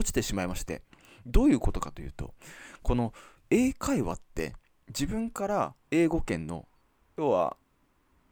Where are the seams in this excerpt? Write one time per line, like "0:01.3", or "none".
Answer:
0:03.4
0:04.6
0:05.8